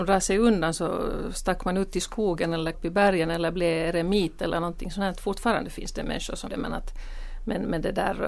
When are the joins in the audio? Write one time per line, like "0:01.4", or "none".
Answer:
0:02.7
0:06.5